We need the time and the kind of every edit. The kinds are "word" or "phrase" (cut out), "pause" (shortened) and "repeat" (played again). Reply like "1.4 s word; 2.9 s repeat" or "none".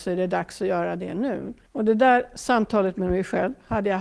1.7 s pause